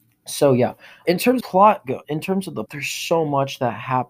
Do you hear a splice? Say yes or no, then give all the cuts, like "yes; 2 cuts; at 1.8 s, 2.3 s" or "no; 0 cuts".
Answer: yes; 4 cuts; at 1.0 s, 1.4 s, 2.0 s, 2.7 s